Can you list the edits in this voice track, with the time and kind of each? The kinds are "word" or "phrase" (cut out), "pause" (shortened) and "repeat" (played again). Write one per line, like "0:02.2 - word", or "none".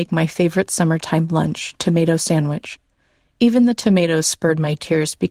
none